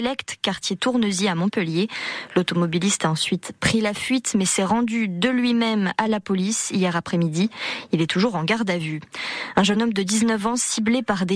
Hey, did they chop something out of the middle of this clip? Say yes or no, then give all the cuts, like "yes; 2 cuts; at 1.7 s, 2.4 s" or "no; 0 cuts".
no; 0 cuts